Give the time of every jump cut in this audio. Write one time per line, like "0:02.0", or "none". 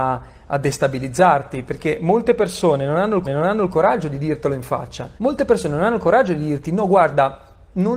0:03.2
0:05.2